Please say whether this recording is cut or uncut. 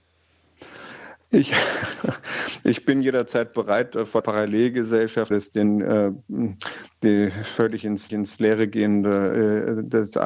cut